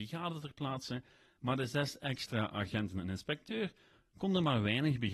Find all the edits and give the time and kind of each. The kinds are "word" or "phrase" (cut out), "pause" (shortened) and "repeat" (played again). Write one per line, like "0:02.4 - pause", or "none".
none